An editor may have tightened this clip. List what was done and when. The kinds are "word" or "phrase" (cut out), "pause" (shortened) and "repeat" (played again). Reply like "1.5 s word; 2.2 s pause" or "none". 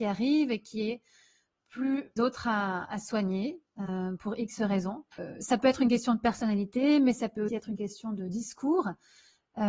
2.2 s phrase; 5.1 s pause; 7.5 s word